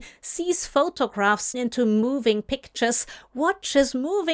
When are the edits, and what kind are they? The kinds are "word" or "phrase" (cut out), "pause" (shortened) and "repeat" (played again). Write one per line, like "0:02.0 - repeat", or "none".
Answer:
0:01.5 - word